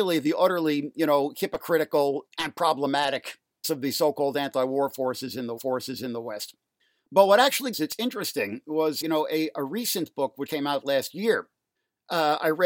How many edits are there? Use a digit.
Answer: 6